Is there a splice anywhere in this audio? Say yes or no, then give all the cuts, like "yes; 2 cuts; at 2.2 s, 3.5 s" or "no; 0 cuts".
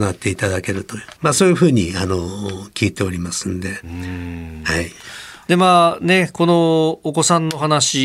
yes; 1 cut; at 1.2 s